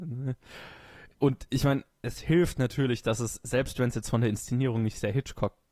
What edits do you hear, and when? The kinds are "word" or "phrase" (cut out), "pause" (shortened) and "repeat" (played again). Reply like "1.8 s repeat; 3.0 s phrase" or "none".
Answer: none